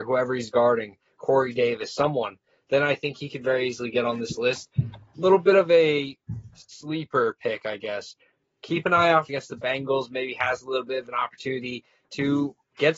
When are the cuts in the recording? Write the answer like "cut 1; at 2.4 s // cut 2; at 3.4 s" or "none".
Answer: cut 1; at 6.5 s // cut 2; at 9.3 s

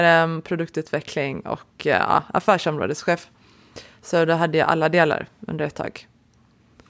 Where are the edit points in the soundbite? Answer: none

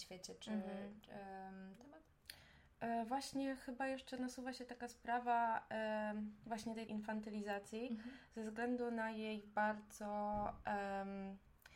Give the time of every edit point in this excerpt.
cut 1; at 1.8 s // cut 2; at 6.9 s

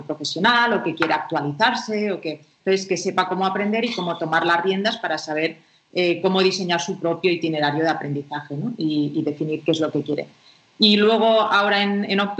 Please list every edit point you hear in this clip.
none

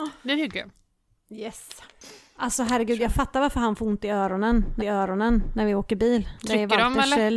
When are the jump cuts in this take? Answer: cut 1; at 4.8 s

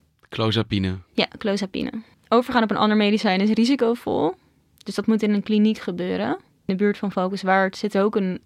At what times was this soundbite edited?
none

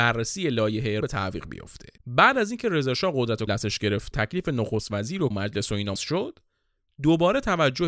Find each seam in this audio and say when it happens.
cut 1; at 1.0 s // cut 2; at 2.0 s // cut 3; at 3.5 s // cut 4; at 4.1 s // cut 5; at 5.3 s // cut 6; at 6.0 s

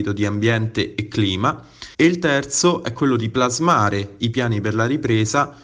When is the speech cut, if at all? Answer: cut 1; at 1.9 s

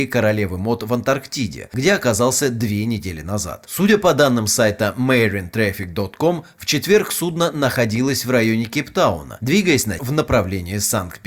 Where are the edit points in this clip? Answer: cut 1; at 10.0 s

